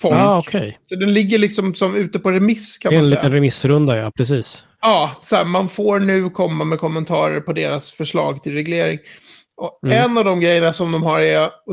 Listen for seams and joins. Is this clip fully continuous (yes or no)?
yes